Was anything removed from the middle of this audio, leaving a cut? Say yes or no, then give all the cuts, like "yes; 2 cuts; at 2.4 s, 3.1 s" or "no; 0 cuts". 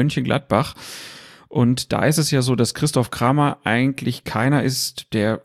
no; 0 cuts